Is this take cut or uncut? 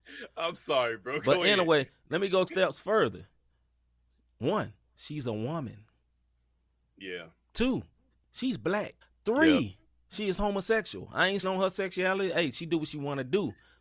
cut